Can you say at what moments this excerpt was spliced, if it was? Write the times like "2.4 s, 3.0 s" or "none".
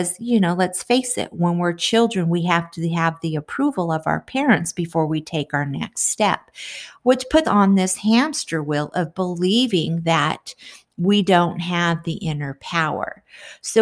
7.4 s